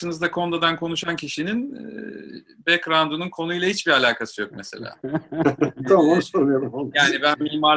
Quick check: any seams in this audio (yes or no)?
no